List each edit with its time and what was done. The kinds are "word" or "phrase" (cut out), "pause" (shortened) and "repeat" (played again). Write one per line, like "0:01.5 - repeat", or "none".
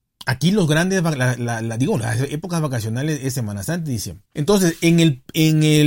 0:04.3 - pause